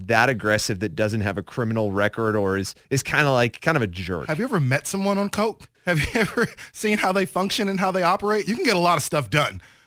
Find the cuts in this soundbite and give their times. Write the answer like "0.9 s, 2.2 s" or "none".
2.8 s, 5.7 s